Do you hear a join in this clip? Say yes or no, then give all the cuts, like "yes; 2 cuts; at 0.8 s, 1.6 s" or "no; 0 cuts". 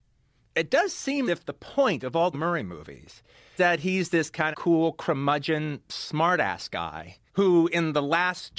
yes; 5 cuts; at 1.3 s, 2.3 s, 3.6 s, 4.5 s, 7.3 s